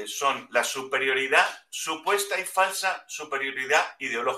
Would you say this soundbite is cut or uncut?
uncut